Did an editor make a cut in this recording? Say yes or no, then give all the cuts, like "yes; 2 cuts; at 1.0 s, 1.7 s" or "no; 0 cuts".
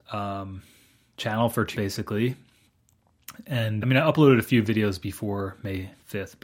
yes; 2 cuts; at 1.7 s, 3.8 s